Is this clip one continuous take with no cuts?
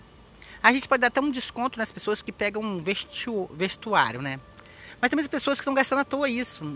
yes; 0 cuts

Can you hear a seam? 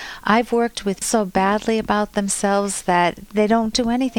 yes; 1 cut; at 1.0 s

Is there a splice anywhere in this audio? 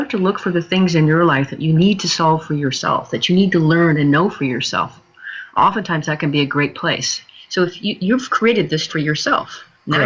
yes; 1 cut; at 8.9 s

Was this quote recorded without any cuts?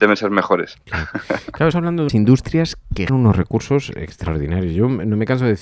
no; 3 cuts; at 1.7 s, 2.1 s, 3.1 s

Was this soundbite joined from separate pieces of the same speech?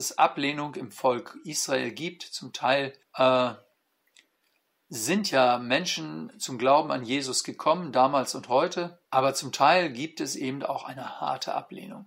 yes; 2 cuts; at 3.0 s, 9.0 s

